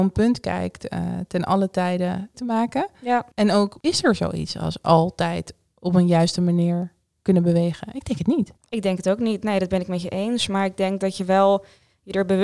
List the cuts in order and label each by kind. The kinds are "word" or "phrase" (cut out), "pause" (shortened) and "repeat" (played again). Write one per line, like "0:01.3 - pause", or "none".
0:02.3 - phrase
0:03.3 - pause
0:03.8 - pause
0:08.6 - pause